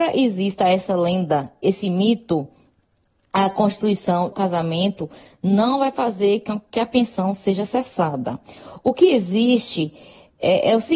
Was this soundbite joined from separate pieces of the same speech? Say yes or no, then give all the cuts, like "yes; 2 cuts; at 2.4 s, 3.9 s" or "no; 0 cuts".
yes; 1 cut; at 4.3 s